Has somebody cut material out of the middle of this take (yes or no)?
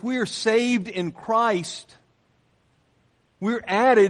no